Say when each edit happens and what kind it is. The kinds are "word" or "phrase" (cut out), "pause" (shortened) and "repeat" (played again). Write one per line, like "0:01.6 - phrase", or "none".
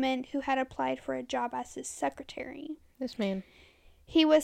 none